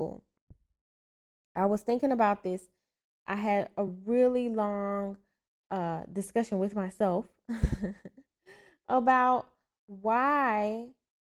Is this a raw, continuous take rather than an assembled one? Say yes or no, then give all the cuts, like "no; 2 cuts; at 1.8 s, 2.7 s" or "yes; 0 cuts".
yes; 0 cuts